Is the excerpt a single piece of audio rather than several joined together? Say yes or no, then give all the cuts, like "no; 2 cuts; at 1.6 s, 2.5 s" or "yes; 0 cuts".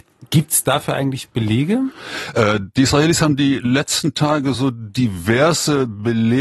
yes; 0 cuts